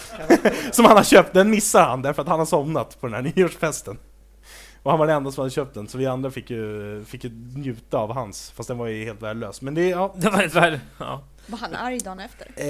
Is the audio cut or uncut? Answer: uncut